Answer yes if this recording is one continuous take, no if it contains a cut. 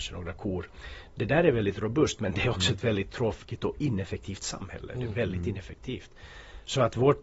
yes